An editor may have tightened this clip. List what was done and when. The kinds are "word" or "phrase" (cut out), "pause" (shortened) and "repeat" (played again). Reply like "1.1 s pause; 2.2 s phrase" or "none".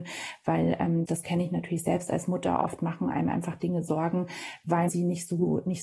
1.1 s word; 4.9 s word

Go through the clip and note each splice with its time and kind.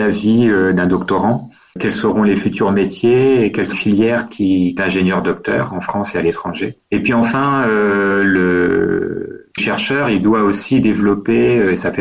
1.8 s word; 3.7 s word; 4.8 s phrase; 9.6 s word

